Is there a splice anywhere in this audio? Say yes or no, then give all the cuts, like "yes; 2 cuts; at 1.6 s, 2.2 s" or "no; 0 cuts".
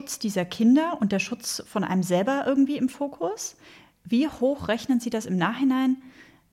no; 0 cuts